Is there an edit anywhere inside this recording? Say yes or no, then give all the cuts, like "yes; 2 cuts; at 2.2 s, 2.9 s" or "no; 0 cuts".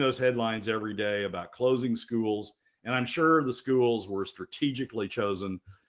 no; 0 cuts